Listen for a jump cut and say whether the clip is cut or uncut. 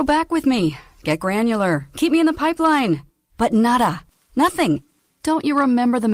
uncut